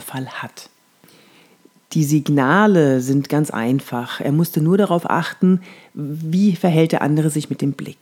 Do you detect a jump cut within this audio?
no; 0 cuts

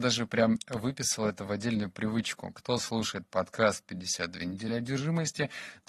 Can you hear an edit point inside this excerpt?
no; 0 cuts

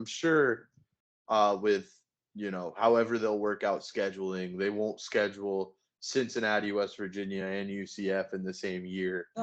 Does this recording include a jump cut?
no; 0 cuts

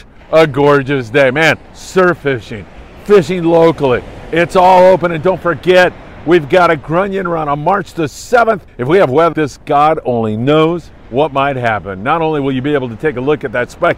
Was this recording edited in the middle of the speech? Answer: yes; 4 cuts; at 1.6 s, 8.7 s, 9.3 s, 11.0 s

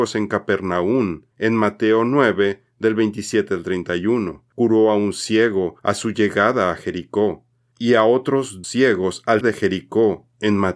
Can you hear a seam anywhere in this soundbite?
yes; 5 cuts; at 1.3 s, 4.5 s, 5.8 s, 8.6 s, 9.4 s

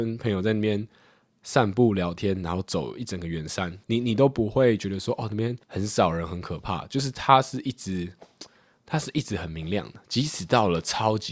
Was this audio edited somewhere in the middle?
yes; 2 cuts; at 3.8 s, 5.6 s

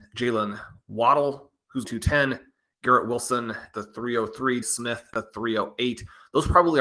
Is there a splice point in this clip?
yes; 4 cuts; at 1.8 s, 3.7 s, 4.6 s, 5.1 s

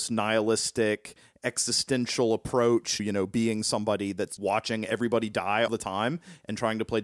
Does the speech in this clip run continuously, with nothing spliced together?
no; 3 cuts; at 3.0 s, 4.4 s, 5.7 s

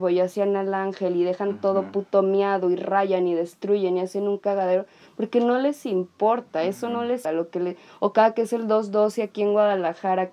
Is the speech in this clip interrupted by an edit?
yes; 1 cut; at 7.2 s

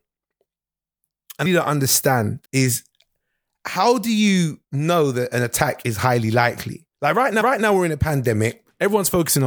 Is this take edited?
yes; 5 cuts; at 1.5 s, 2.4 s, 4.6 s, 6.9 s, 7.4 s

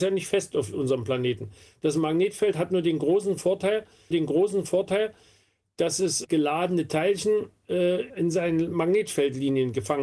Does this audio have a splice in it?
yes; 3 cuts; at 4.1 s, 6.2 s, 8.1 s

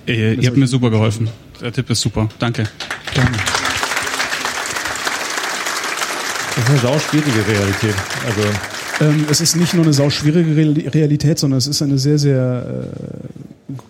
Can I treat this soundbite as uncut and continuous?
yes; 0 cuts

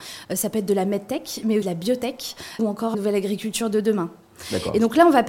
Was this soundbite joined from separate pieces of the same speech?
yes; 3 cuts; at 1.6 s, 2.6 s, 2.9 s

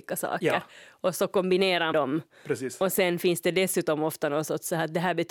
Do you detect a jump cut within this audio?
yes; 1 cut; at 1.9 s

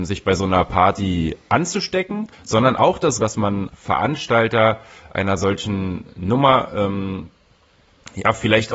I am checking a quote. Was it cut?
yes; 3 cuts; at 2.3 s, 3.2 s, 3.7 s

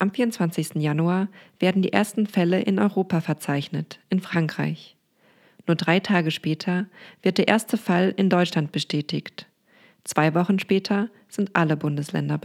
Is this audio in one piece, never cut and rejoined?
yes; 0 cuts

